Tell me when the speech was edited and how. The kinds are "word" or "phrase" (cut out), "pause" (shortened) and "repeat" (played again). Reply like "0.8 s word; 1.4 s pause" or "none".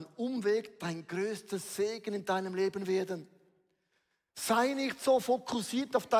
none